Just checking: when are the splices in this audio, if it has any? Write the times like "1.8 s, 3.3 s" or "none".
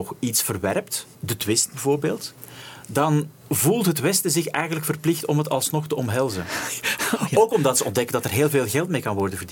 1.1 s